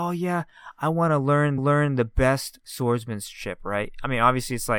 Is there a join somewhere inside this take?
yes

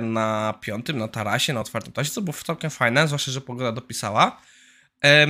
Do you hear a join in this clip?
no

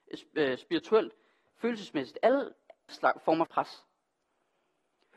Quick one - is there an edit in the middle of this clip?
yes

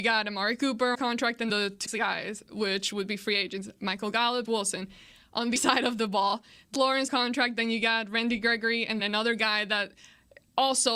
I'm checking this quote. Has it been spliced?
yes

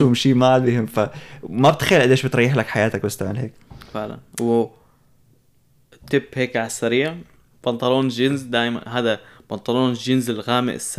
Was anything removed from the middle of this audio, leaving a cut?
no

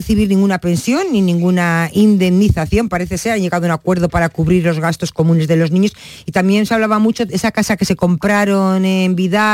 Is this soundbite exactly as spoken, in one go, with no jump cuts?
yes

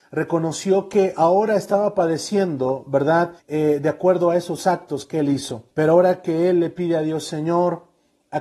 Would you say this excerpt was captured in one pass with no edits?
no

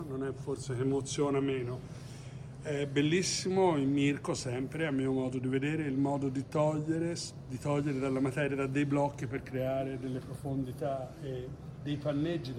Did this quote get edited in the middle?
no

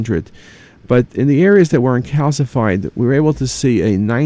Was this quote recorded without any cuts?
yes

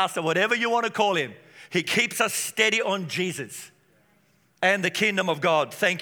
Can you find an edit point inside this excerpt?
no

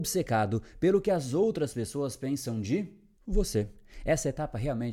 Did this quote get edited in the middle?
yes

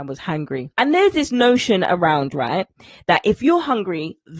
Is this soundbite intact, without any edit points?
yes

